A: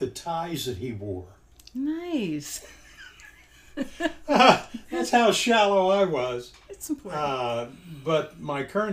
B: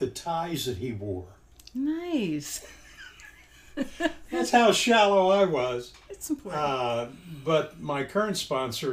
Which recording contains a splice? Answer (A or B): B